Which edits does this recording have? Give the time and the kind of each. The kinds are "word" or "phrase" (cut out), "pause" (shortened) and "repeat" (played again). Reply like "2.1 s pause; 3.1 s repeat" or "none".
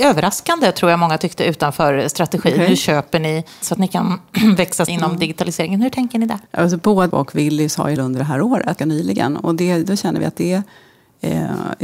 3.6 s phrase; 4.9 s word; 6.5 s pause; 7.1 s word; 8.0 s phrase; 8.8 s phrase